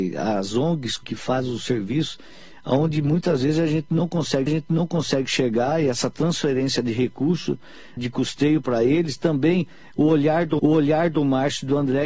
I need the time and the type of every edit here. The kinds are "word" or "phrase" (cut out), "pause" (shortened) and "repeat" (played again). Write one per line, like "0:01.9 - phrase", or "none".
0:01.0 - phrase
0:04.5 - repeat
0:08.0 - word
0:10.6 - repeat